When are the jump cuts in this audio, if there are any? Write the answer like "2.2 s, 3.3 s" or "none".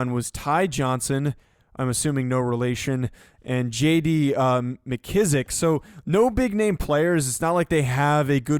none